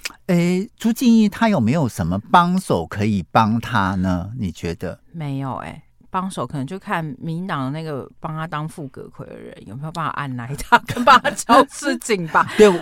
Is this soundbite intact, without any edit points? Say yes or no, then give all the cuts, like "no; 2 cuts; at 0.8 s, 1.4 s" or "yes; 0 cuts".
yes; 0 cuts